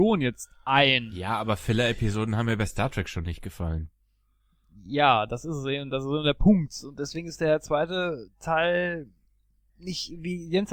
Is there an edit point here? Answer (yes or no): no